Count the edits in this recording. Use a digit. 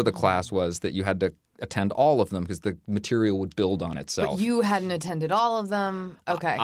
0